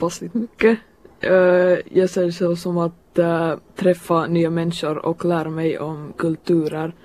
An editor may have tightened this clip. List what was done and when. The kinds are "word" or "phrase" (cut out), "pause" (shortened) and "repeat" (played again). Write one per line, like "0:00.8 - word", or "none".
0:03.7 - pause